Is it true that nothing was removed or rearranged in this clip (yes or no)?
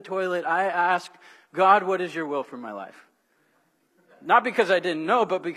yes